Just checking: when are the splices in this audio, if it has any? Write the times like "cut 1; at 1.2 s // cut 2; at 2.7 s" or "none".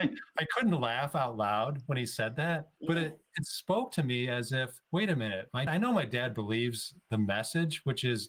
cut 1; at 2.8 s // cut 2; at 4.8 s // cut 3; at 5.7 s